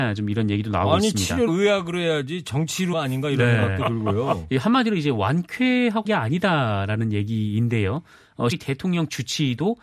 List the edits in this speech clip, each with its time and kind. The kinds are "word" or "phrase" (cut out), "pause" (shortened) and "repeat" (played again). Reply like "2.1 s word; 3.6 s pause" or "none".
1.5 s word; 2.9 s word; 6.1 s word; 8.5 s word